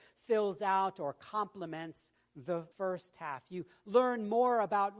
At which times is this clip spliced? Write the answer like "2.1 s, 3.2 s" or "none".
2.7 s